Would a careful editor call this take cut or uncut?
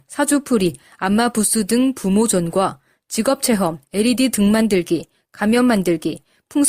uncut